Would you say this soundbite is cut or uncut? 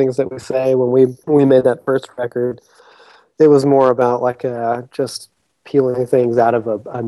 uncut